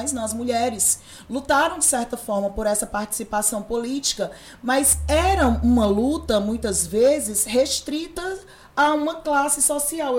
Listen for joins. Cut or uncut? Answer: uncut